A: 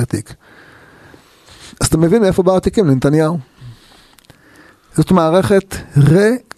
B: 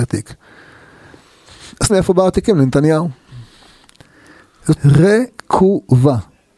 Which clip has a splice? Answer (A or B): B